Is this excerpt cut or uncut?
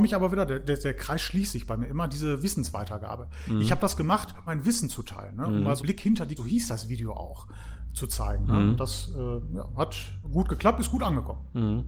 cut